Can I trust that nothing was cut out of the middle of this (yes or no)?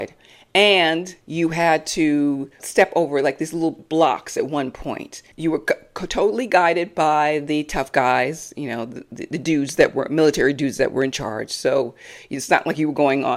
no